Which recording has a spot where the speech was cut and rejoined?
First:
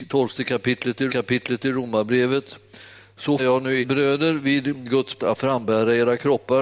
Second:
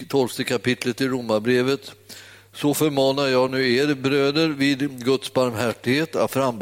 first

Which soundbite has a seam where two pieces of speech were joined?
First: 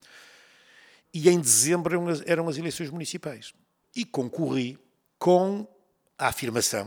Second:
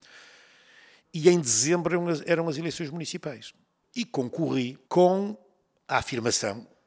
second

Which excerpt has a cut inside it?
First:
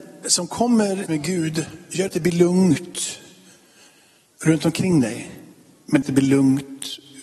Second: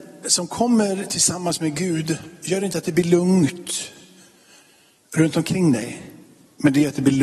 first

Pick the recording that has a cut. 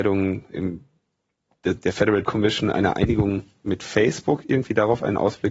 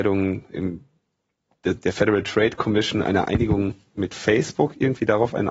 first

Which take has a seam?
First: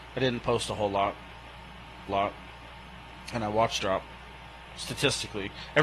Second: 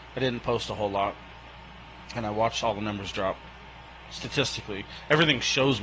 first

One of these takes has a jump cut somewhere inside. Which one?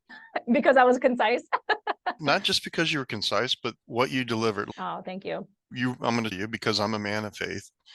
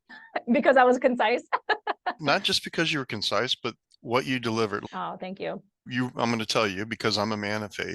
first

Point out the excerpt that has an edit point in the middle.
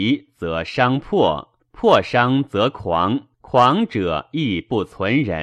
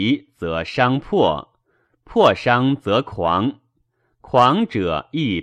first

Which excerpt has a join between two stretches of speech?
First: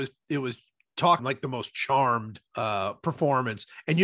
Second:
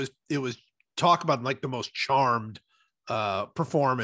first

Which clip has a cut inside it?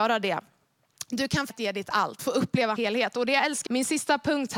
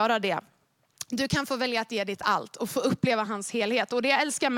first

